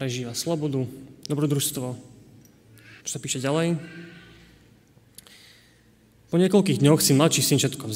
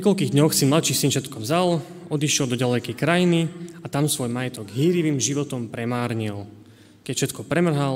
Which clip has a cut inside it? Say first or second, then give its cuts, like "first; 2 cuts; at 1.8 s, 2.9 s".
first; 1 cut; at 3.0 s